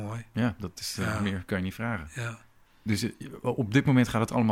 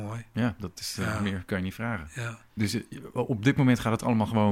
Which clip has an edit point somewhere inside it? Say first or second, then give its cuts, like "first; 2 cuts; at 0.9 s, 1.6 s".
second; 1 cut; at 2.5 s